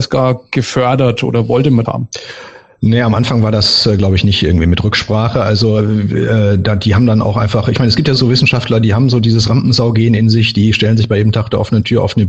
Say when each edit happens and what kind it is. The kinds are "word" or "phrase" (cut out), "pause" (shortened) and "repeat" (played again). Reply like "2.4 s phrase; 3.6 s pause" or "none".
1.8 s word; 8.2 s word